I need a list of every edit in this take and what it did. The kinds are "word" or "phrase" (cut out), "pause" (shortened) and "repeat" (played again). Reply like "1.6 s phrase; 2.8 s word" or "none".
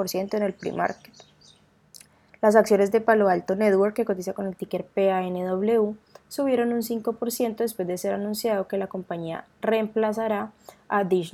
none